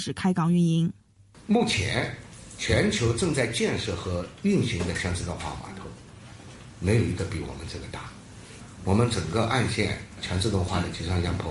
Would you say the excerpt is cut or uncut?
uncut